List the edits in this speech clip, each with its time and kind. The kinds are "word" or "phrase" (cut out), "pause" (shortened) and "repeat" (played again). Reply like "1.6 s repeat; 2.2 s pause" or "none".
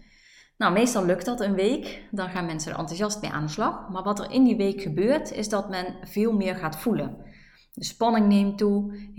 none

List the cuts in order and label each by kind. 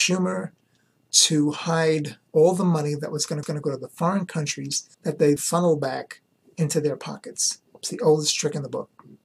2.3 s pause; 3.4 s repeat; 4.9 s pause; 5.4 s word; 7.7 s pause

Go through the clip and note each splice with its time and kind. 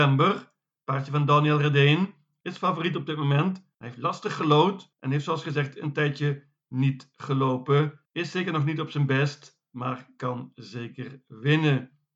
8.0 s pause

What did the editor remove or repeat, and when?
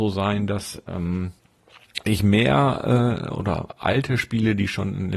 none

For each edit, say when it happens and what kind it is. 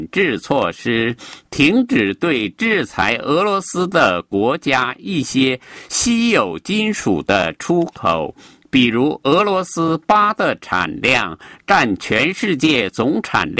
none

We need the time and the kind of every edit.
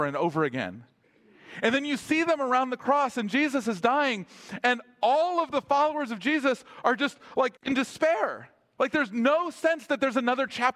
7.6 s pause

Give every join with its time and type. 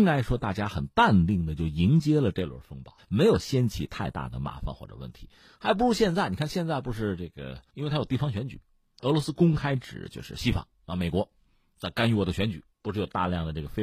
7.7 s pause; 12.7 s pause

